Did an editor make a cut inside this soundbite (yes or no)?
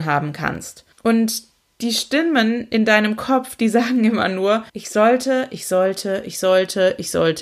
yes